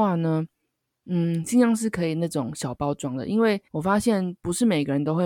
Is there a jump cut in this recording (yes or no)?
yes